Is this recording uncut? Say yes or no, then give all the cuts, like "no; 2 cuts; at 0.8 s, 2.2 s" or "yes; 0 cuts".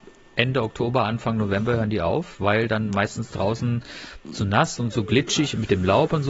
yes; 0 cuts